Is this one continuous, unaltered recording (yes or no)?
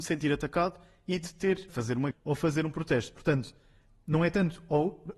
no